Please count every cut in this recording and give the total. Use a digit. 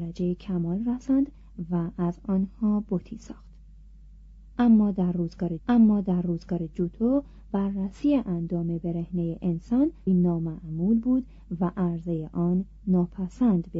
2